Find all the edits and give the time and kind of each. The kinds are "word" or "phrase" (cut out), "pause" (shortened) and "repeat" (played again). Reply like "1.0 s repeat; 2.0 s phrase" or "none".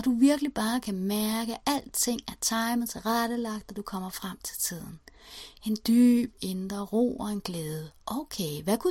none

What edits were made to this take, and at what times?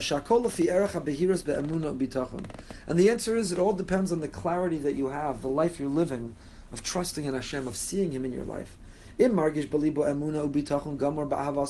none

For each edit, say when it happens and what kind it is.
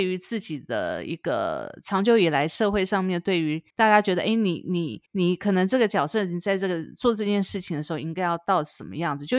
3.7 s pause; 5.1 s pause

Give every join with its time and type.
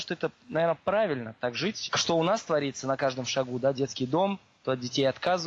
none

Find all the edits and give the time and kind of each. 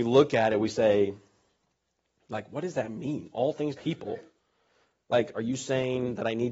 3.8 s word

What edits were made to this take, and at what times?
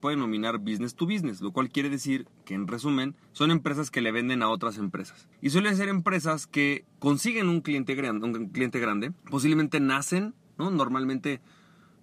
3.2 s pause; 5.3 s pause; 9.2 s pause

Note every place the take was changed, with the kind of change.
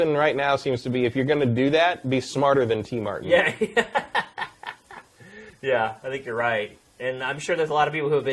none

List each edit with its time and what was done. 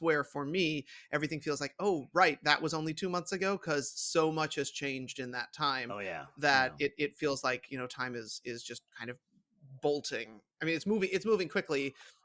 none

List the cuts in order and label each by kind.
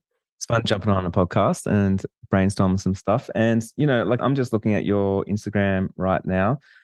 4.2 s word

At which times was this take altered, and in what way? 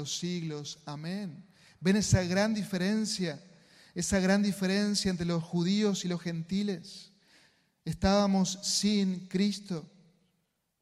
none

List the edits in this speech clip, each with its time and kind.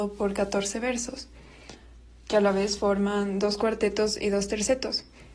none

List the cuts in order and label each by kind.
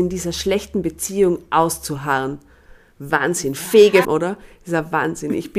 4.0 s word

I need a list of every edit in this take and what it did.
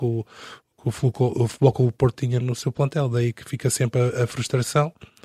2.4 s word

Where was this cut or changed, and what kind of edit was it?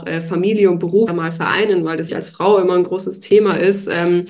1.1 s word; 2.1 s word

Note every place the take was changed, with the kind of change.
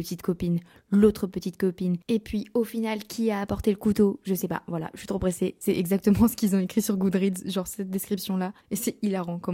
2.0 s pause; 8.6 s pause

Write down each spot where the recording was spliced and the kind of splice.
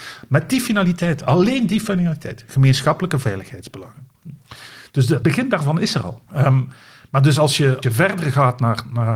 5.2 s word; 6.3 s pause; 7.8 s word

